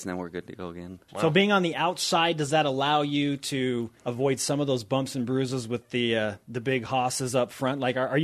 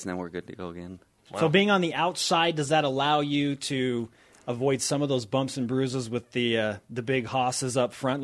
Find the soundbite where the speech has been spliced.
first; 2 cuts; at 1.1 s, 4.0 s

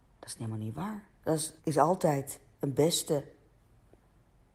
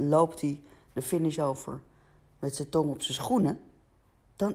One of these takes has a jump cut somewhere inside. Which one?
first; 2 cuts; at 1.2 s, 1.6 s

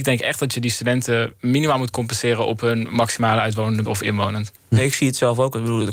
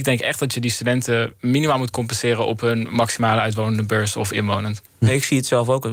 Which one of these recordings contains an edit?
first; 1 cut; at 3.8 s

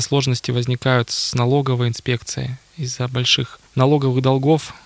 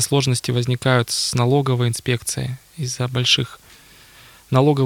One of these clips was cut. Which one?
first; 1 cut; at 3.7 s

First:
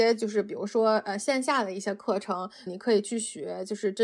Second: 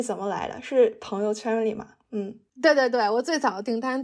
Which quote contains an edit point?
first; 1 cut; at 2.7 s

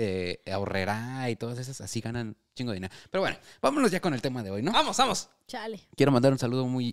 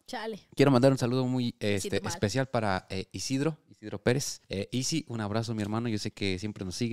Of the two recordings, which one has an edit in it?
second; 1 cut; at 4.4 s

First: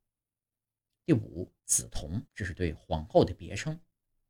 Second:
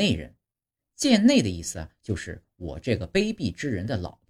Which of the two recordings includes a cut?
first; 2 cuts; at 1.6 s, 2.3 s

